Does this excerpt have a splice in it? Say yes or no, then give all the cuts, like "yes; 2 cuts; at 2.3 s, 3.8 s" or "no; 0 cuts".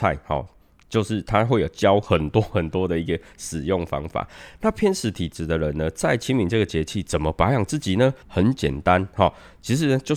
yes; 1 cut; at 8.2 s